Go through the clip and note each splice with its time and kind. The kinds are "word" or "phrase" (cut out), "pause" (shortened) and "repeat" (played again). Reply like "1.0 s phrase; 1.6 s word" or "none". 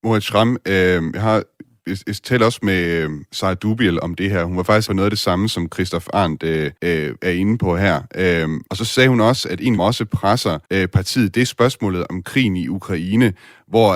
4.9 s word; 6.8 s pause; 8.7 s pause; 9.8 s phrase; 10.6 s pause